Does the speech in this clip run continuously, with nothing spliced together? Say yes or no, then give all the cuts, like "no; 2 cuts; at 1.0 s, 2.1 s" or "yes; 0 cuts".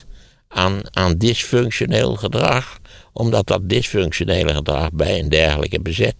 yes; 0 cuts